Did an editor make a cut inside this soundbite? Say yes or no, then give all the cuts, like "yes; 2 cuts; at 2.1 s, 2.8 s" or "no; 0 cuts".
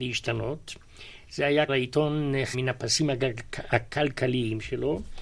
yes; 2 cuts; at 1.7 s, 2.5 s